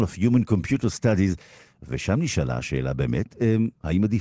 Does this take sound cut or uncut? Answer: uncut